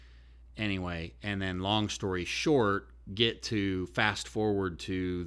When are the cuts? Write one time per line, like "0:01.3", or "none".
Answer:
none